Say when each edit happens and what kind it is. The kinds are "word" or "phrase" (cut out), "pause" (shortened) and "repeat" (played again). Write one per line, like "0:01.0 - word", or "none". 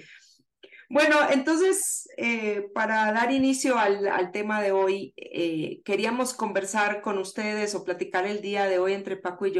none